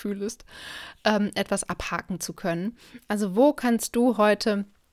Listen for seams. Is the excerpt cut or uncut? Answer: uncut